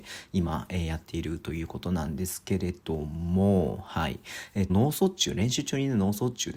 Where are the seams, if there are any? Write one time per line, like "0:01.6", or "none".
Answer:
0:04.7